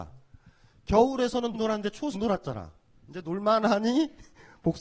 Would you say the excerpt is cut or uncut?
cut